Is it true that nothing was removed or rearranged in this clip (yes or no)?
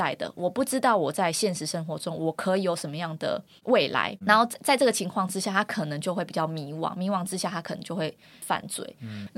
yes